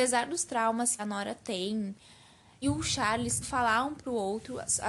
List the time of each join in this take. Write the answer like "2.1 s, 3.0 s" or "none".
1.0 s, 2.6 s, 3.4 s